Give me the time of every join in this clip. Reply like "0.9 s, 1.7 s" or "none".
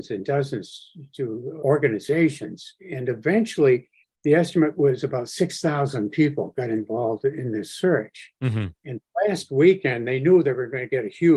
1.6 s, 4.0 s